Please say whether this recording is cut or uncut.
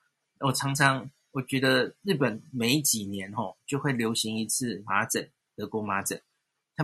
uncut